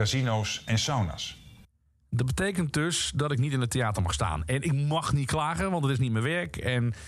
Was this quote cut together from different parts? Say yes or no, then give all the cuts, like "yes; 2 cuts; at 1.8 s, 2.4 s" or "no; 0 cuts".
no; 0 cuts